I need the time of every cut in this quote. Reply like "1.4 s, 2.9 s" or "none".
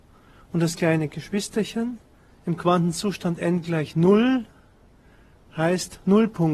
none